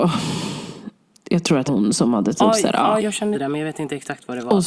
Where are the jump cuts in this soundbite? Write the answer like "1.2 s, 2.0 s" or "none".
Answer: 1.7 s, 3.0 s, 3.3 s